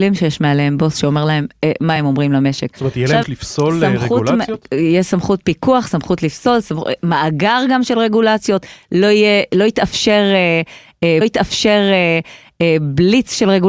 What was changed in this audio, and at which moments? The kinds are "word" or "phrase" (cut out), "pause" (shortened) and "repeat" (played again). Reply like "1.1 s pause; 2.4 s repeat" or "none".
2.0 s phrase; 3.2 s word; 11.2 s repeat